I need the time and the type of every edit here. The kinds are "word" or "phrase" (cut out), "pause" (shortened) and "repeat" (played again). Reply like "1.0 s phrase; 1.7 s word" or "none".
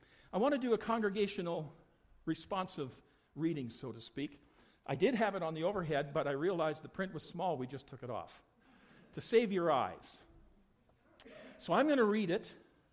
7.2 s word

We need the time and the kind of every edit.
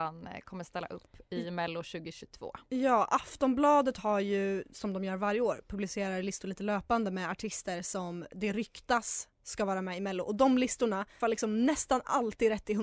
11.2 s word

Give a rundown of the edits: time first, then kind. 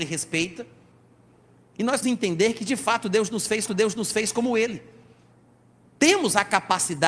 2.0 s word; 3.7 s repeat

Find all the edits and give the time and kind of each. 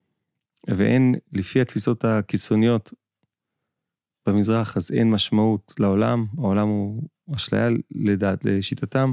none

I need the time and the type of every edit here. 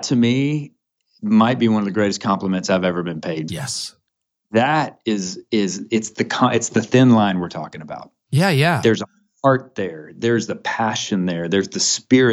3.5 s word

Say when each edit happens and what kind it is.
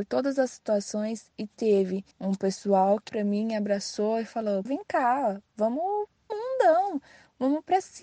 2.1 s pause; 3.1 s word; 4.6 s word; 6.3 s phrase

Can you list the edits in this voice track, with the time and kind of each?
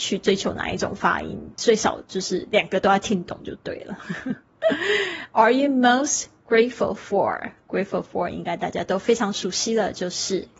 none

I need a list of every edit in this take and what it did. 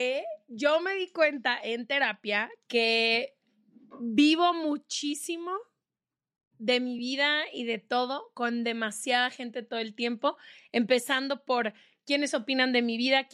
none

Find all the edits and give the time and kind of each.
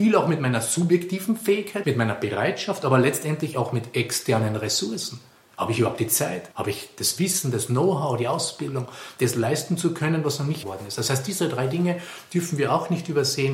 1.8 s phrase; 6.5 s pause; 10.6 s word

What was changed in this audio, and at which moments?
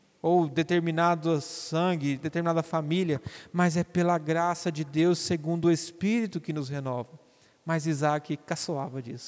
none

